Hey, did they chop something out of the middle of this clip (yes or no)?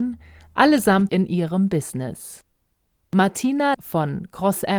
yes